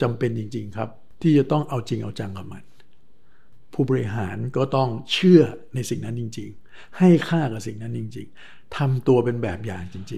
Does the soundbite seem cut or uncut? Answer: uncut